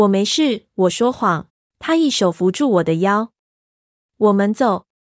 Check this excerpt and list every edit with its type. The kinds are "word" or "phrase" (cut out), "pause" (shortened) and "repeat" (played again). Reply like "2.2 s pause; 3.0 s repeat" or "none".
1.6 s pause